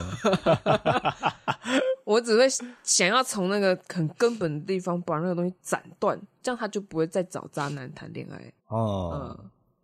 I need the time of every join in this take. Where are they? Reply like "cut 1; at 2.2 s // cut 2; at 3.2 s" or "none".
cut 1; at 8.6 s